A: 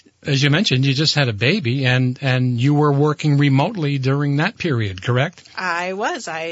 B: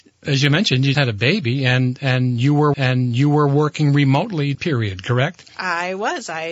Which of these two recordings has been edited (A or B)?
B